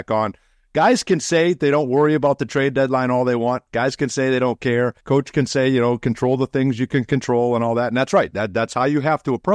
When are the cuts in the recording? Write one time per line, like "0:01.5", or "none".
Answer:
0:05.0

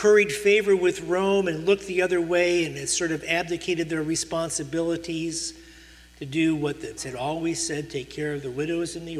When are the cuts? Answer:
0:07.0

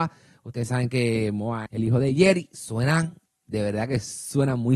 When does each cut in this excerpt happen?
0:01.7
0:03.3

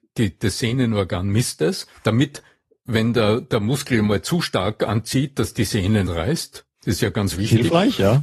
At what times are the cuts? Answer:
0:02.0
0:06.1
0:06.7

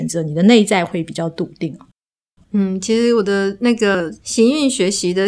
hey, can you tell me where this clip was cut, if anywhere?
none

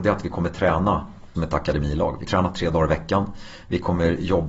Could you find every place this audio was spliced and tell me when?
0:01.4
0:02.3

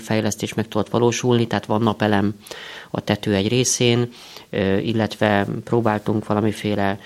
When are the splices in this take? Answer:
none

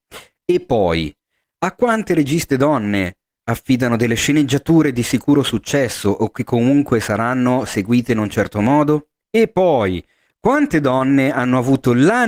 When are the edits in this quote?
0:09.2

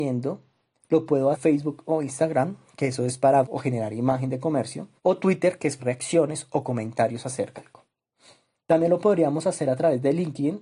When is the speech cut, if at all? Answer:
0:01.3
0:03.4
0:05.0
0:05.8
0:07.6

